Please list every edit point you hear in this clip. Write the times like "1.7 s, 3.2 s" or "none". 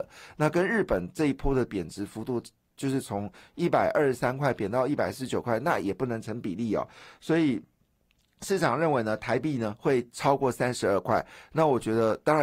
none